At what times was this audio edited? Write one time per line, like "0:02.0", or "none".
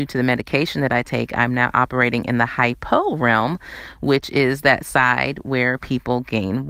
none